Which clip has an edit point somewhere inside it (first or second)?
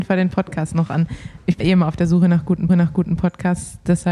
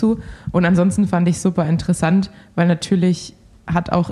first